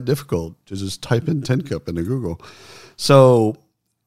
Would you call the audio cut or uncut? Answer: uncut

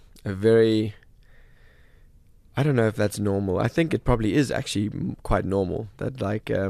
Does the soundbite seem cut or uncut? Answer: uncut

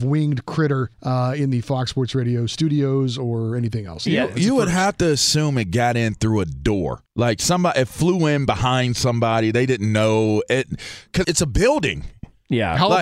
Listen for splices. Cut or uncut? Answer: cut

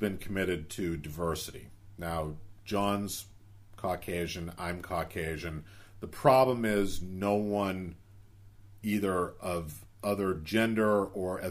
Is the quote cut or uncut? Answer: uncut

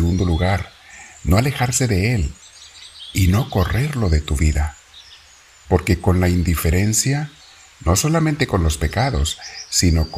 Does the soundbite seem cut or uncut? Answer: uncut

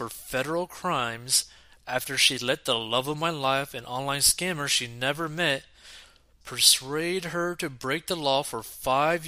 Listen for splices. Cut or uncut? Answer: uncut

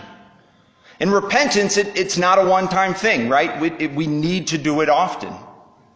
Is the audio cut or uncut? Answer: uncut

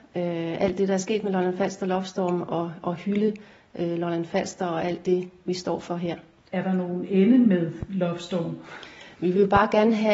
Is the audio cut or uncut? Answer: uncut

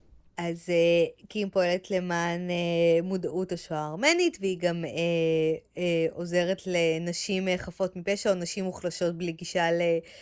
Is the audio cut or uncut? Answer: uncut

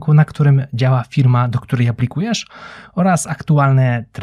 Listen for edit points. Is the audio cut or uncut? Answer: uncut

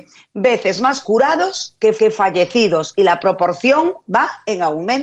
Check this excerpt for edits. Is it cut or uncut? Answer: cut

